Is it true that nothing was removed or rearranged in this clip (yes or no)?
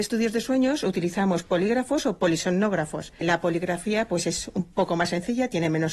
no